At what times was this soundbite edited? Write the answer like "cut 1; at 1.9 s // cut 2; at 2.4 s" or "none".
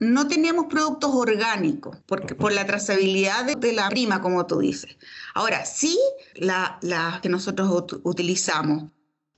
cut 1; at 2.0 s // cut 2; at 3.5 s // cut 3; at 3.9 s // cut 4; at 6.3 s // cut 5; at 7.2 s